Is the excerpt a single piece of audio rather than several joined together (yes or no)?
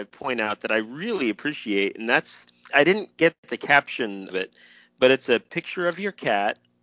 no